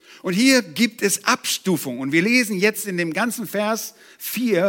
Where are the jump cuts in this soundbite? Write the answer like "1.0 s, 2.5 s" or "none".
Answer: none